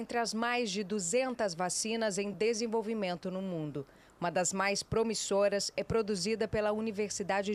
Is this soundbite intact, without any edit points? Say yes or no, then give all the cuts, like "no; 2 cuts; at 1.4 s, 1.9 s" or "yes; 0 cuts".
yes; 0 cuts